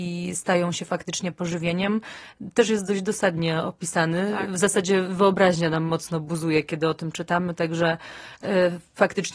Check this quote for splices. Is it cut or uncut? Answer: uncut